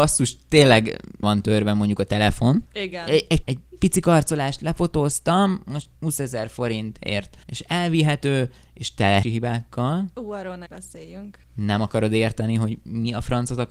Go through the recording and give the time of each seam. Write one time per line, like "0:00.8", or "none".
0:01.2
0:02.7
0:03.4
0:05.9
0:07.4
0:09.2
0:10.7
0:11.4